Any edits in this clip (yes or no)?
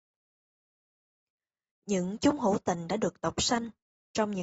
no